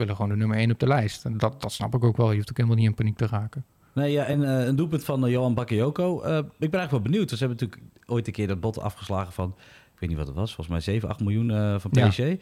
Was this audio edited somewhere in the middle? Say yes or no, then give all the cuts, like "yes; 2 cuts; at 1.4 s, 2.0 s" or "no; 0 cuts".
no; 0 cuts